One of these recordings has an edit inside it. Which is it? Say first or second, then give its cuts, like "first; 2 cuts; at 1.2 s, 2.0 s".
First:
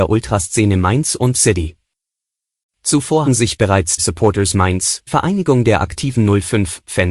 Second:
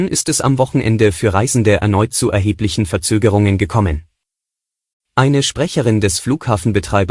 first; 4 cuts; at 1.3 s, 3.3 s, 4.0 s, 5.1 s